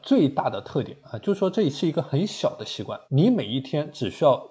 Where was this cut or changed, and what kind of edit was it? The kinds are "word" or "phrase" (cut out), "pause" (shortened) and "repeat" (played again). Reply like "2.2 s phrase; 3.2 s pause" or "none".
3.0 s pause